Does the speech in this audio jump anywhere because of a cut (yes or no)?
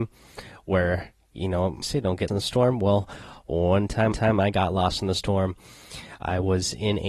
yes